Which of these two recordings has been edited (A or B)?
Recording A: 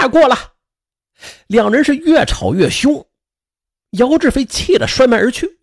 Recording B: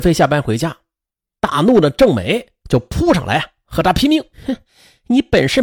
B